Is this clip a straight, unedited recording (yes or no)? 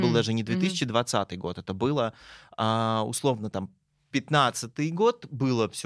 yes